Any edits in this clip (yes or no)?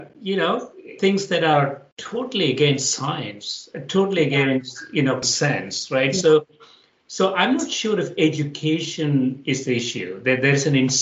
yes